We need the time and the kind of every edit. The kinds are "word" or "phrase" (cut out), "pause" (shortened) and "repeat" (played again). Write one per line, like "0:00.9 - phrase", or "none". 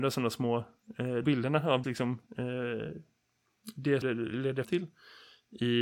0:01.2 - word
0:01.8 - word
0:02.3 - pause
0:04.0 - word
0:04.6 - word